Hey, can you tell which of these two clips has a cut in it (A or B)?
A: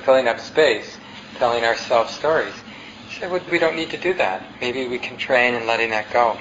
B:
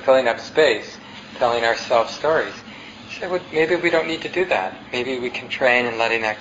A